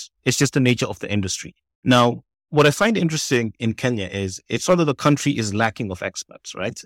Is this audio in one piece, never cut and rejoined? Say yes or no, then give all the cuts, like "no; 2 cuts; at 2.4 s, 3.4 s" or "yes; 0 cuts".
yes; 0 cuts